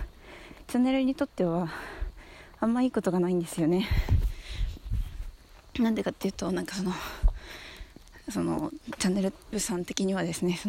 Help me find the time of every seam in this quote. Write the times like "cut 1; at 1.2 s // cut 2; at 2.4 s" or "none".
cut 1; at 9.5 s